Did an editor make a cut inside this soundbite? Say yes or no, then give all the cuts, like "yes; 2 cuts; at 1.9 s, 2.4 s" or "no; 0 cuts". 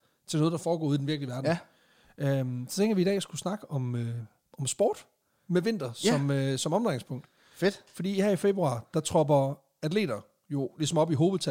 no; 0 cuts